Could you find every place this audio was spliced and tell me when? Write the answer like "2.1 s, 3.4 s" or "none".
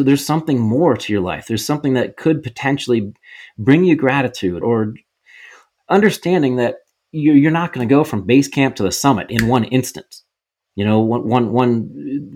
4.6 s